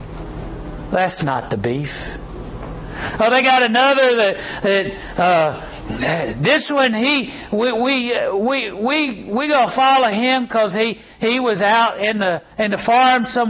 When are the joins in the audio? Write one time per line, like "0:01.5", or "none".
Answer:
0:12.5